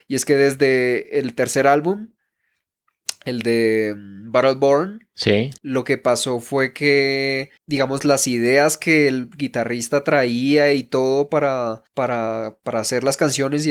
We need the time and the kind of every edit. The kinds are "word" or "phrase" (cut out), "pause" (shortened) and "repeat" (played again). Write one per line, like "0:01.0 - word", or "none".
0:05.6 - pause
0:07.6 - pause
0:11.9 - pause